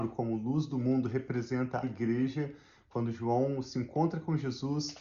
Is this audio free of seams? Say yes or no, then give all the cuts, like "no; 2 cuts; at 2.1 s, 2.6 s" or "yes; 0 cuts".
no; 1 cut; at 1.8 s